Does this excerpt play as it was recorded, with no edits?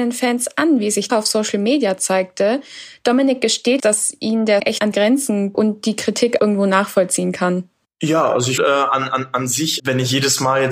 no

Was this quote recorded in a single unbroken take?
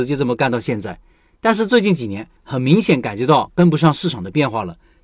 no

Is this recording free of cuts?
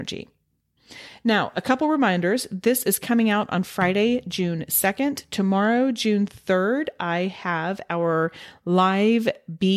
yes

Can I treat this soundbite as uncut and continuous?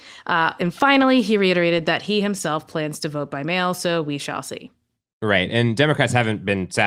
yes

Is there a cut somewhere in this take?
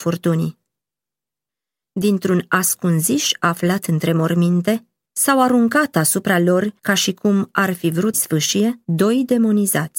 yes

